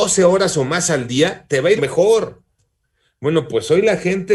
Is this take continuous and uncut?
no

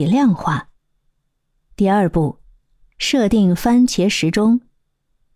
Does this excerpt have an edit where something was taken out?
no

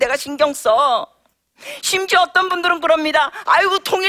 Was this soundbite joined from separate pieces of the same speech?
no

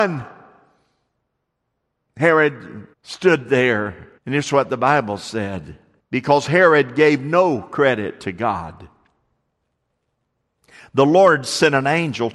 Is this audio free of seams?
no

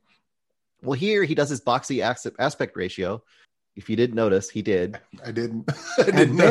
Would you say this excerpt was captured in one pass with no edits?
no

